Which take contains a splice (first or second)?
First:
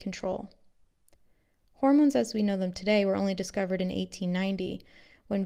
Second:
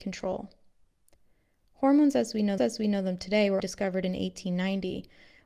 second